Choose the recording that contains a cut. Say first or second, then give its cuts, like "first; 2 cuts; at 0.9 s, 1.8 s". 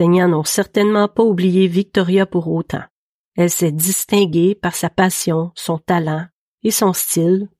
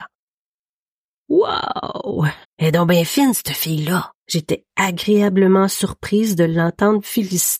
second; 2 cuts; at 2.4 s, 4.2 s